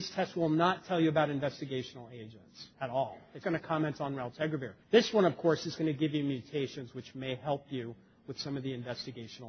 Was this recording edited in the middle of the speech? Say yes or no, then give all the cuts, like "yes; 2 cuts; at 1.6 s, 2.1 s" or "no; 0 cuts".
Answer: yes; 3 cuts; at 2.7 s, 3.4 s, 4.8 s